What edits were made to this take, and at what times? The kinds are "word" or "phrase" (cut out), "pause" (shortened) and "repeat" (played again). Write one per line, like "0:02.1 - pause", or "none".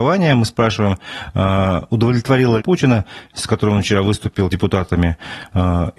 0:02.6 - phrase
0:04.5 - word

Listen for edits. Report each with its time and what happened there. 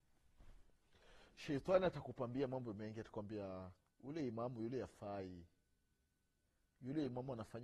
0:03.8 - pause

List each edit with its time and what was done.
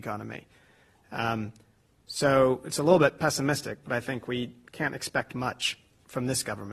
none

